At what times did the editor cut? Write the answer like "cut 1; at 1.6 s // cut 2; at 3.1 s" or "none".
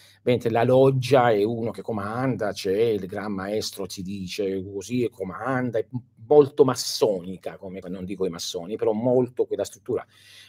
cut 1; at 7.8 s